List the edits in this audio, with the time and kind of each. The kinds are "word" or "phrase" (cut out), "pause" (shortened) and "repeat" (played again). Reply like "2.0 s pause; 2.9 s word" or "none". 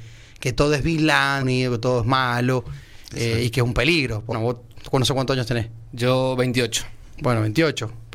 1.4 s phrase; 4.3 s word